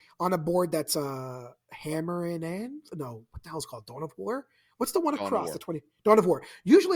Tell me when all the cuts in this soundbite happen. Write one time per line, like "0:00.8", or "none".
none